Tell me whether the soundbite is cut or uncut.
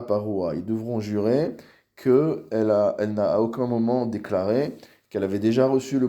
uncut